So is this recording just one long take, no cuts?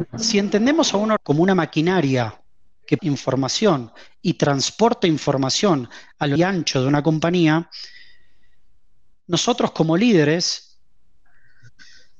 no; 3 cuts; at 1.2 s, 3.0 s, 6.4 s

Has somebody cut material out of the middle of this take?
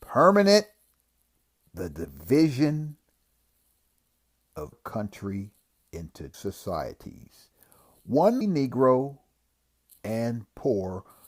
yes; 3 cuts; at 4.7 s, 6.3 s, 8.4 s

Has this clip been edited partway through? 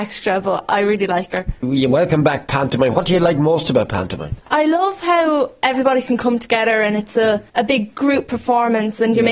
yes; 2 cuts; at 4.4 s, 7.5 s

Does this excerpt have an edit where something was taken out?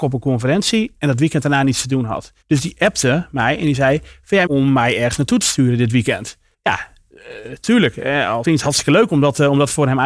yes; 4 cuts; at 2.4 s, 4.5 s, 6.5 s, 8.4 s

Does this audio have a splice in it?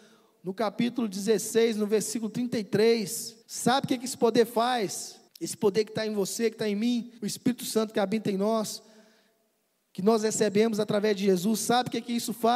yes; 3 cuts; at 3.4 s, 5.3 s, 7.2 s

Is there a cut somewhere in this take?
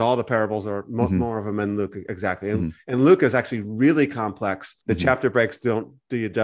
yes; 1 cut; at 4.8 s

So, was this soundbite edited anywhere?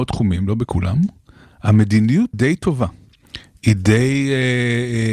yes; 1 cut; at 2.3 s

